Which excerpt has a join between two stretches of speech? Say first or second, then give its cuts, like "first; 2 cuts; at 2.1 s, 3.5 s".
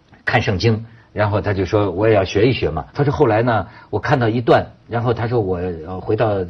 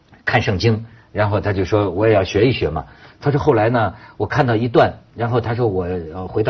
first; 1 cut; at 2.9 s